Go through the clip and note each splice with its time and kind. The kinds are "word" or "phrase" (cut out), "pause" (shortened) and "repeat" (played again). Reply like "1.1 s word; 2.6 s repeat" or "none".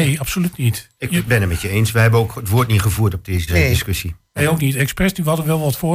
3.5 s word